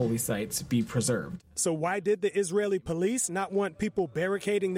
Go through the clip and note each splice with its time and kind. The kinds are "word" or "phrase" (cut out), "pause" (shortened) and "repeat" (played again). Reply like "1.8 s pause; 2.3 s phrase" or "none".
none